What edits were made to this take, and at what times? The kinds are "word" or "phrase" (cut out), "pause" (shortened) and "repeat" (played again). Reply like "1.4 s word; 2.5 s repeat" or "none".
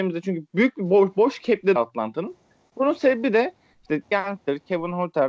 1.8 s word; 4.1 s word